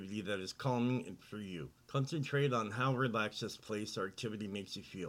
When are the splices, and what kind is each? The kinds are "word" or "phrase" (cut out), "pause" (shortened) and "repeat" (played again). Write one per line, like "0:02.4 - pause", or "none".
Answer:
0:01.2 - word
0:01.8 - pause